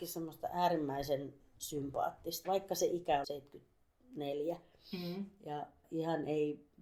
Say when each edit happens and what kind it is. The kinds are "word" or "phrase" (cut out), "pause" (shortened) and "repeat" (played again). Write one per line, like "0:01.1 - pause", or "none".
0:02.4 - word
0:03.2 - word
0:05.8 - word